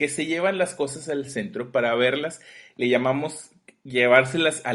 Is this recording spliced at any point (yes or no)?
no